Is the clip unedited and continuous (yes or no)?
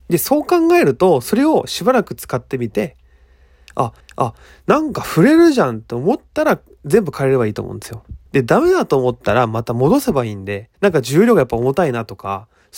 no